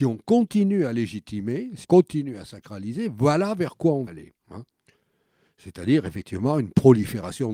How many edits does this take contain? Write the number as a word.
three